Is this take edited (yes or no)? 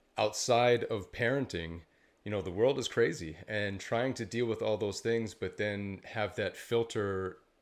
no